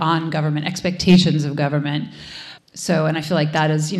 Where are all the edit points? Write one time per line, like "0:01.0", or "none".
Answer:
0:02.6